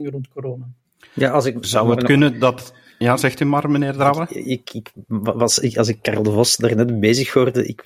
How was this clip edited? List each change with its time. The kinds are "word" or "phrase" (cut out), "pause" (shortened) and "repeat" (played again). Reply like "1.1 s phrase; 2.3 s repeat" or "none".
4.6 s word